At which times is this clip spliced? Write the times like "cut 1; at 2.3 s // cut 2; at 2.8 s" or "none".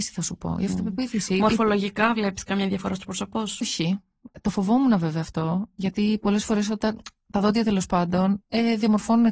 cut 1; at 3.6 s